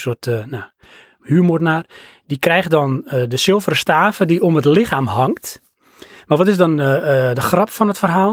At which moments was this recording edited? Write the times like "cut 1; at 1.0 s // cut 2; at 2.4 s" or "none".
none